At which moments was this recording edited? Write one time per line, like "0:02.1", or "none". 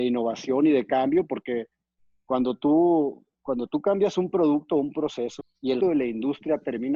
0:05.4
0:05.8